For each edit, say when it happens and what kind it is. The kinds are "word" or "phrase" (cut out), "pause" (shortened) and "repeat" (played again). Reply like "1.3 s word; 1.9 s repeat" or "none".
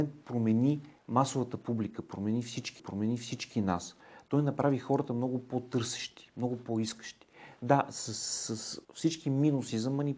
1.0 s pause; 2.8 s repeat; 8.8 s pause